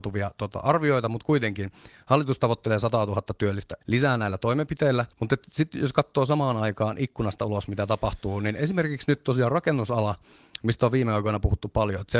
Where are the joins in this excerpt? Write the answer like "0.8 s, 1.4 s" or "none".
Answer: 3.8 s, 5.1 s